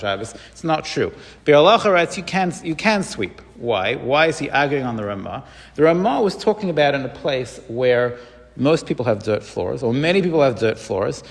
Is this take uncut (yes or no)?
yes